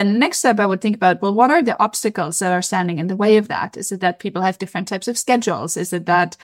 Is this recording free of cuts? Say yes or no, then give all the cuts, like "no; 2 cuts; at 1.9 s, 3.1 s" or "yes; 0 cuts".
yes; 0 cuts